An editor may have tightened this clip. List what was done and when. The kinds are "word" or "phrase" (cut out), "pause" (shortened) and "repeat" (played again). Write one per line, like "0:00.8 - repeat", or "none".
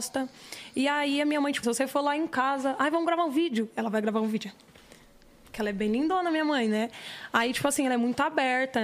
0:01.6 - word